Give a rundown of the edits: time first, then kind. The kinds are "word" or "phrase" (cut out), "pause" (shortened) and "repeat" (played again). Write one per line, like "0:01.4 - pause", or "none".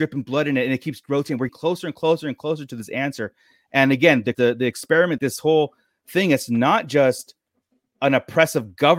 0:01.5 - word
0:04.3 - word
0:05.2 - word